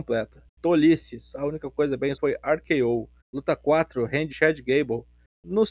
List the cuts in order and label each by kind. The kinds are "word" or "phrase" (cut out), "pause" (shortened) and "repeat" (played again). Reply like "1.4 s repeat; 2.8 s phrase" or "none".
2.2 s word; 3.2 s pause; 4.3 s phrase